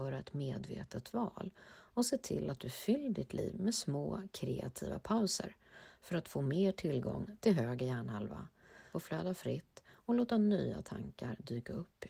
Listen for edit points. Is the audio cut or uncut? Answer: cut